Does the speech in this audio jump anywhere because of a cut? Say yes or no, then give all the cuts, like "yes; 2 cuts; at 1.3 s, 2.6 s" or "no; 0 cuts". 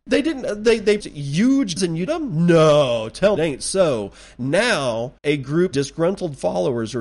yes; 6 cuts; at 1.0 s, 1.8 s, 2.1 s, 3.4 s, 5.2 s, 5.7 s